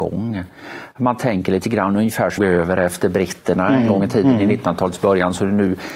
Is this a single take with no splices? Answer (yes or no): no